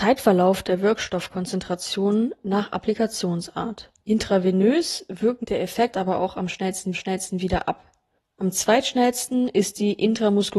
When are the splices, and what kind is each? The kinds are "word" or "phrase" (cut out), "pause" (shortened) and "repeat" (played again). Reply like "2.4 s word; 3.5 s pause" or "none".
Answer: 4.0 s pause; 5.4 s phrase; 5.9 s word; 6.9 s repeat; 8.2 s pause